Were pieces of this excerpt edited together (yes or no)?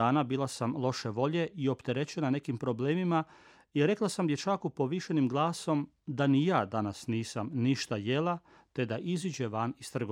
no